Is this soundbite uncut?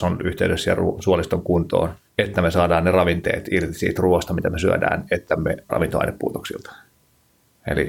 no; 2 cuts; at 2.1 s, 5.7 s

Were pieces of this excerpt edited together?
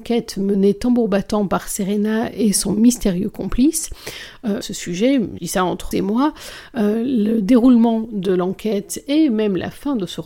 yes; 3 cuts; at 4.6 s, 5.4 s, 5.9 s

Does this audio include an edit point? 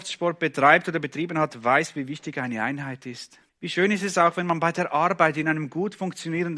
yes; 1 cut; at 3.5 s

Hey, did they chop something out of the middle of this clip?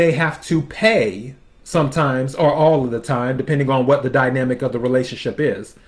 no; 0 cuts

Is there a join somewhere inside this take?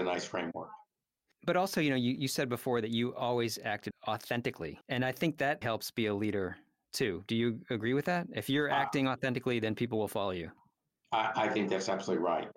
yes; 2 cuts; at 4.8 s, 5.6 s

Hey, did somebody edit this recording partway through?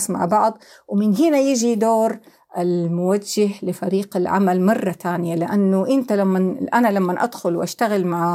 no; 0 cuts

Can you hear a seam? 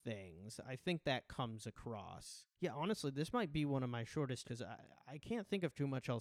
yes; 2 cuts; at 2.5 s, 4.4 s

